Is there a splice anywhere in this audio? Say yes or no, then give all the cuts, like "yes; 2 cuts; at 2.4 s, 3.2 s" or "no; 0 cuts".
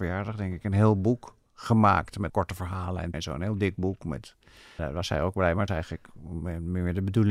yes; 4 cuts; at 2.3 s, 3.1 s, 4.8 s, 5.7 s